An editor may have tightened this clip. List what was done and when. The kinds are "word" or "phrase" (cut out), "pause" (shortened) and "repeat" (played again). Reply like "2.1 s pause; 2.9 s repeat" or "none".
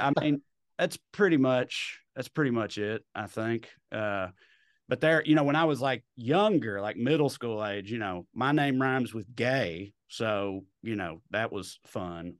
none